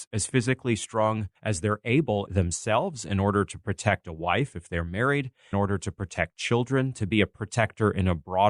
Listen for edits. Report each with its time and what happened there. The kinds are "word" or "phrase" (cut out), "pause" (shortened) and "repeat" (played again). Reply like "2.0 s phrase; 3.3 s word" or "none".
1.3 s pause; 2.3 s phrase; 5.5 s phrase

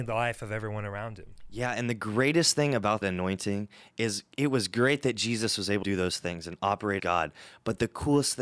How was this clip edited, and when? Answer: 3.0 s word; 5.8 s word; 7.0 s word

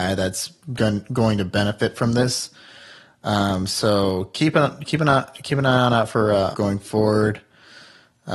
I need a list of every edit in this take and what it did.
6.5 s phrase

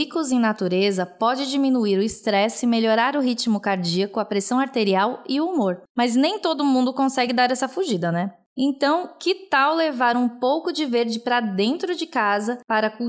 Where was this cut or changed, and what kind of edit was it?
none

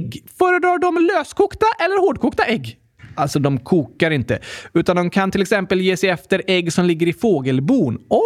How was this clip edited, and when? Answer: none

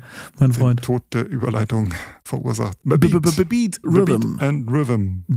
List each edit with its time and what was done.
3.8 s word

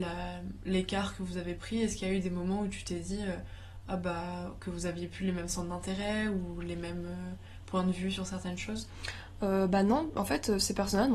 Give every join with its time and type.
none

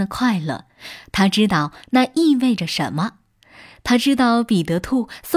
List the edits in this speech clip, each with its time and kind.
none

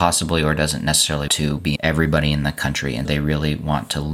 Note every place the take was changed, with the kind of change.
1.3 s word; 1.8 s word; 3.0 s word

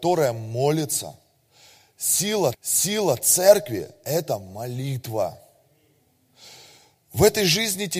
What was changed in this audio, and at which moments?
2.5 s repeat

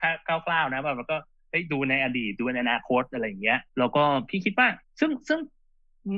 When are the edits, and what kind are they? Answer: 3.7 s pause; 4.8 s pause

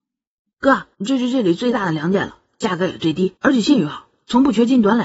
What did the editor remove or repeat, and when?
0.9 s pause; 3.4 s pause

